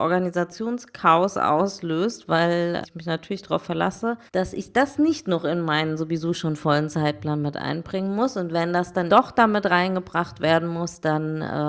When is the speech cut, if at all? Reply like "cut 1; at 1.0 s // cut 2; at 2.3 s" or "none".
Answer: cut 1; at 2.8 s // cut 2; at 4.3 s // cut 3; at 9.1 s